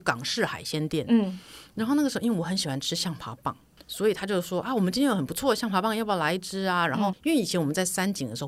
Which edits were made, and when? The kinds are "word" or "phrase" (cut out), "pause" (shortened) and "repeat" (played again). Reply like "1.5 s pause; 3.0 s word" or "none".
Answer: 3.8 s pause; 7.1 s word